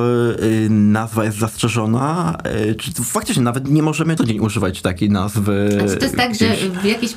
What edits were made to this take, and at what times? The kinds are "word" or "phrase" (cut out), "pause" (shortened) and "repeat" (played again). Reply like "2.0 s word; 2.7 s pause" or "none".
4.2 s phrase